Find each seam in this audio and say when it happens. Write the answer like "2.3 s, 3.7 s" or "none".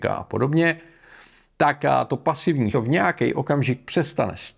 2.7 s